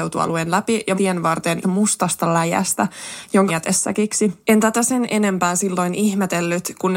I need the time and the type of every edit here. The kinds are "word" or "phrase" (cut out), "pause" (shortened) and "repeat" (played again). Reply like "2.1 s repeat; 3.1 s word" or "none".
1.0 s phrase; 1.6 s word; 3.5 s word; 4.4 s pause